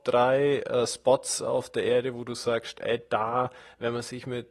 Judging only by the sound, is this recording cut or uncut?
uncut